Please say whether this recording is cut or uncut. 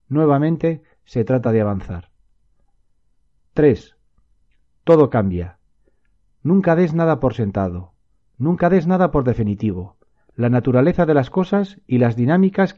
uncut